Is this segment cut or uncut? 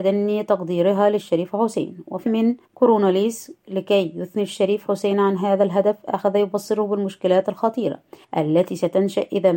cut